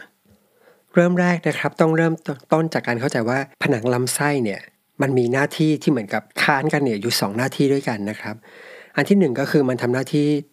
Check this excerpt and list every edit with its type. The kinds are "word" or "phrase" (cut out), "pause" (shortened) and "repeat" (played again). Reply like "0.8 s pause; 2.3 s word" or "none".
3.5 s pause; 4.8 s pause; 6.3 s pause